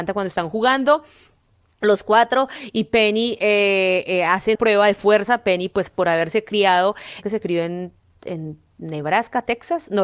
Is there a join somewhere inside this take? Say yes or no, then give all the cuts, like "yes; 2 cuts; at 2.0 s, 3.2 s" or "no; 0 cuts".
yes; 2 cuts; at 4.5 s, 7.2 s